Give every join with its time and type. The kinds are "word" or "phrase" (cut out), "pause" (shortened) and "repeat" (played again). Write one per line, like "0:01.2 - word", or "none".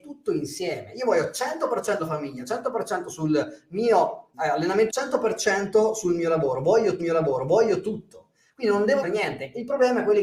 0:02.0 - word
0:04.3 - word
0:04.9 - word
0:07.0 - repeat
0:09.0 - word